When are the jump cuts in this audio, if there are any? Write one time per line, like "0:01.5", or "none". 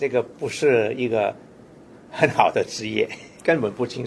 none

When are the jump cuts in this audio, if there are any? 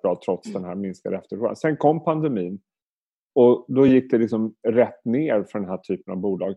none

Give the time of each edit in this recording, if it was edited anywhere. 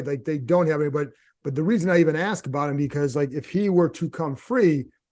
none

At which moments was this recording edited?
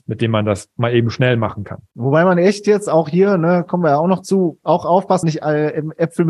0:01.9
0:05.2

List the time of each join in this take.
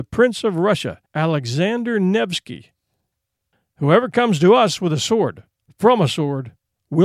0:01.1

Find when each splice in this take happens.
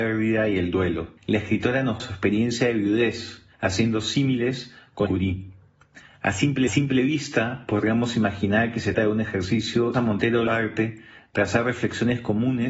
0:01.2
0:02.0
0:03.5
0:05.1
0:06.7
0:08.9
0:09.9
0:10.5

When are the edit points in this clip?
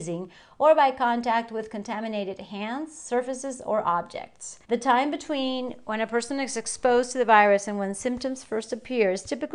0:04.6

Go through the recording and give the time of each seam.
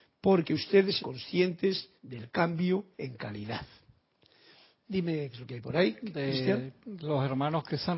0:01.0
0:02.0
0:02.9
0:05.3

